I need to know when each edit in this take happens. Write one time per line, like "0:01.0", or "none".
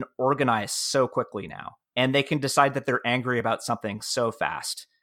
none